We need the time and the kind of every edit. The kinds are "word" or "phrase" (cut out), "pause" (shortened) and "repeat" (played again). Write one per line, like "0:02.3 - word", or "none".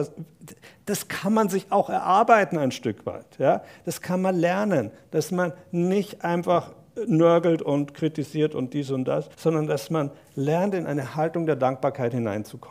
0:09.3 - pause

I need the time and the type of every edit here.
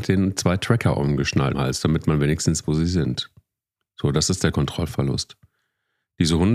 0:01.5 - word
0:02.6 - word
0:04.5 - word

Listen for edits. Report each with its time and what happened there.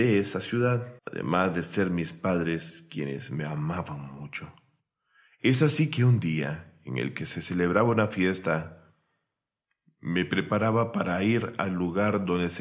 0:01.0 - pause

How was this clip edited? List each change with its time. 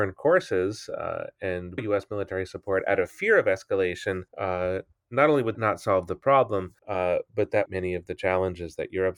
0:01.8 - word
0:04.3 - pause
0:05.5 - word
0:06.8 - pause
0:07.7 - phrase

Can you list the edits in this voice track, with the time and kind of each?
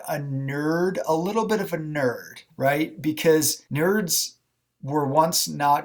0:02.5 - pause
0:03.7 - pause

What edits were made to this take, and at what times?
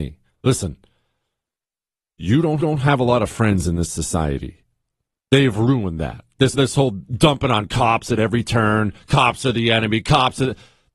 0:02.6 - repeat
0:06.5 - word

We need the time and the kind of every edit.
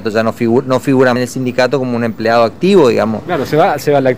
0:01.2 - word

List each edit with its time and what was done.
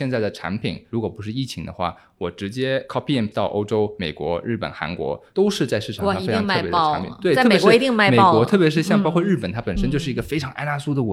0:03.3 - word

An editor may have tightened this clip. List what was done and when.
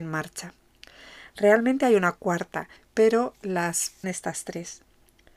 0:02.8 - pause
0:04.0 - phrase

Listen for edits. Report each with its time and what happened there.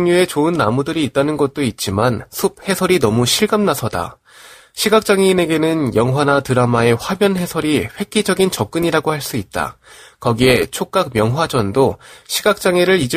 none

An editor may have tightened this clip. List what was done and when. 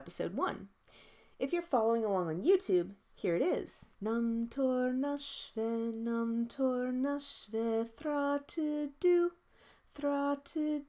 0:03.9 - pause

